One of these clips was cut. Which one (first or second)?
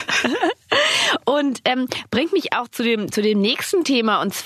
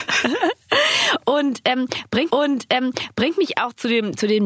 second